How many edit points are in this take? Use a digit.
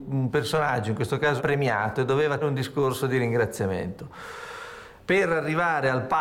3